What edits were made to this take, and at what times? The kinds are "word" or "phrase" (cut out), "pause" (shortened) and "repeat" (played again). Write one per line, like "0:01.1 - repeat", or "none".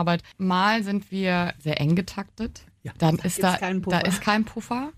none